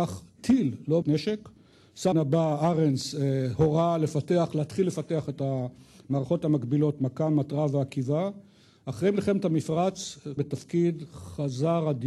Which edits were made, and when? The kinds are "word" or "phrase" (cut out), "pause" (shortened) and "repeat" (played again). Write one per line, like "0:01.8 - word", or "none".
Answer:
0:01.0 - word
0:02.1 - word
0:10.4 - word